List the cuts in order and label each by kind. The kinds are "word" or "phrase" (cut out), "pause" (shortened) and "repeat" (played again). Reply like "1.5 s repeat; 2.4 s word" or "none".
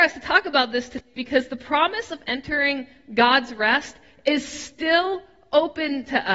none